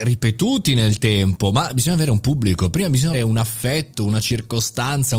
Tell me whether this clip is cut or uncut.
cut